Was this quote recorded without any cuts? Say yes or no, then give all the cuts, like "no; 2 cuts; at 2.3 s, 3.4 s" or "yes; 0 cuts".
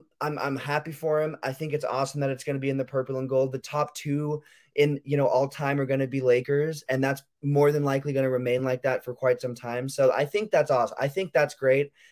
yes; 0 cuts